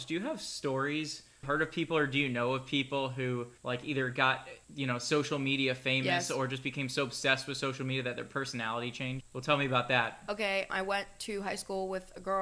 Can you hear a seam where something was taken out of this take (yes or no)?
yes